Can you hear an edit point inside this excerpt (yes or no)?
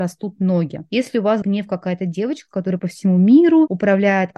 yes